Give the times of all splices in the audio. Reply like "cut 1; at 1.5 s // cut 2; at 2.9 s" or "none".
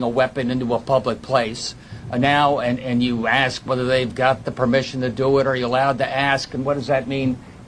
none